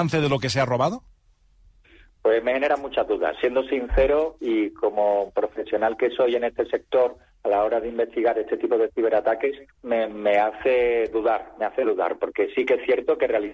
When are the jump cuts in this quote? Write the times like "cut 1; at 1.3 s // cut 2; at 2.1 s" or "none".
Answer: cut 1; at 9.7 s